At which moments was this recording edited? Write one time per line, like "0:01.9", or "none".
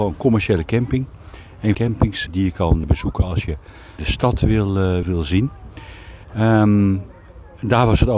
0:01.7
0:02.3
0:02.8
0:04.0
0:05.0

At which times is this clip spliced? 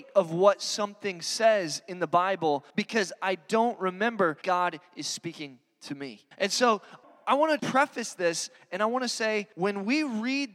0:02.7
0:04.4
0:06.3
0:07.0
0:07.6
0:09.5

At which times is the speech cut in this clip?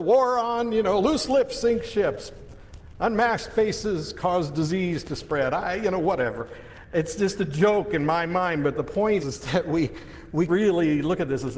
0:09.2
0:10.5

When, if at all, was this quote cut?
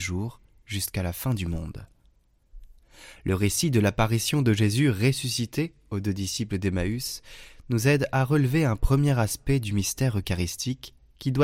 none

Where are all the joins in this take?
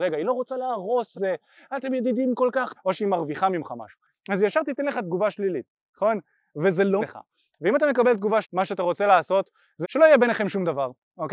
0:01.1
0:02.8
0:07.0
0:08.4
0:09.8

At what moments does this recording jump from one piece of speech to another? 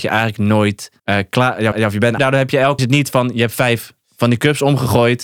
0:01.0
0:01.7
0:02.2
0:02.8
0:04.0

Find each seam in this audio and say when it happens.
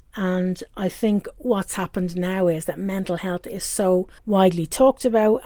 0:04.2

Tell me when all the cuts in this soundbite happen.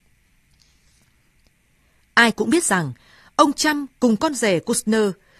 none

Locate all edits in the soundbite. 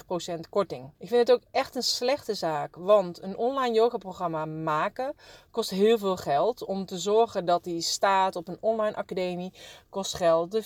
0:00.9

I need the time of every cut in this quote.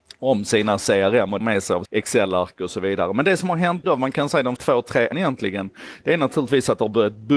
0:01.4
0:01.8
0:03.8
0:04.6
0:05.1

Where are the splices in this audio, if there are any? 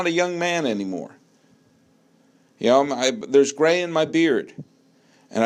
none

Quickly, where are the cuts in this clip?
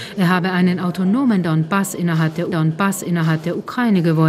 0:02.5

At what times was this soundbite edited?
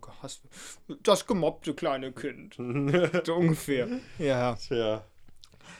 0:01.0

